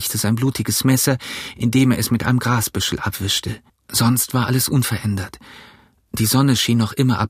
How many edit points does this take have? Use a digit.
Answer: 1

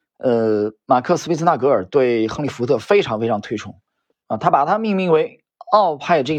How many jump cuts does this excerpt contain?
1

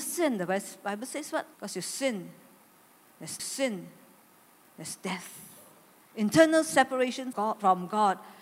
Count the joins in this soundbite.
3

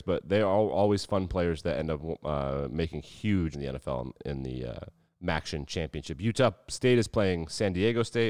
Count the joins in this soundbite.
3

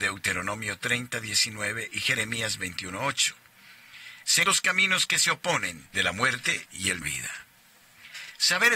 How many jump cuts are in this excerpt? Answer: 3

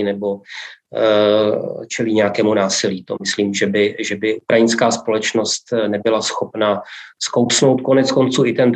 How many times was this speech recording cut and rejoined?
0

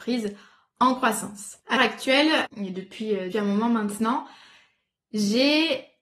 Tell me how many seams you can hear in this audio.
3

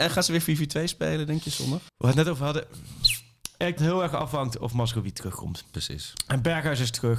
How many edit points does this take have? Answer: 2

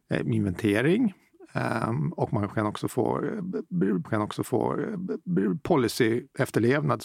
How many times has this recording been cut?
1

